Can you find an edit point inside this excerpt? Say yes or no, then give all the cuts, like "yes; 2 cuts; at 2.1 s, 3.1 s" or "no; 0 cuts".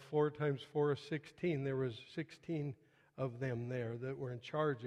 no; 0 cuts